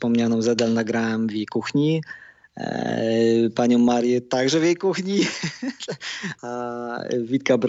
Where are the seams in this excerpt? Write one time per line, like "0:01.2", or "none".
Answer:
0:06.4